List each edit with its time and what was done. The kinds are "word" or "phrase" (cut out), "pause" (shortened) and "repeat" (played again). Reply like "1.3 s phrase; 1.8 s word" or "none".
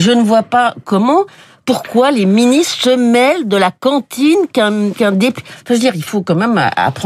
none